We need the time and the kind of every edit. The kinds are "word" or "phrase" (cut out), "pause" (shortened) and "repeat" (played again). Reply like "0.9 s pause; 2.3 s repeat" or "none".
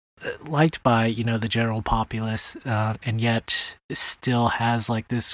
none